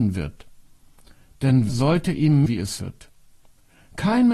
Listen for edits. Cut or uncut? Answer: cut